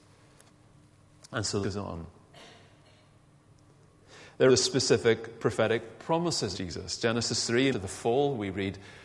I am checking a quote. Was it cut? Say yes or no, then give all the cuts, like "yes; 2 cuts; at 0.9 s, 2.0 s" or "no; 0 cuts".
yes; 4 cuts; at 1.6 s, 4.5 s, 6.5 s, 7.7 s